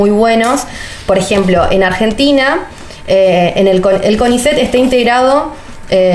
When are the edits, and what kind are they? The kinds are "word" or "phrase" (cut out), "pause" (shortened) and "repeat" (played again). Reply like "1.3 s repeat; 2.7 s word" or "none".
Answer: none